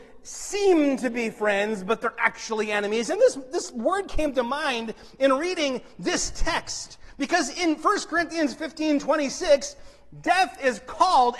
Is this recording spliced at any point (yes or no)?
no